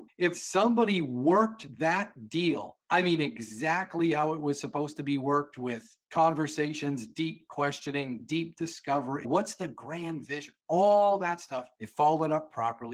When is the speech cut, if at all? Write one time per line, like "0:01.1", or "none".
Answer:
0:02.8
0:06.0
0:11.7